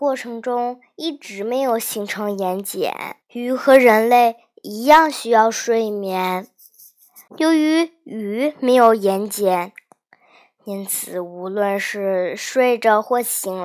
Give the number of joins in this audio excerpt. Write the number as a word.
two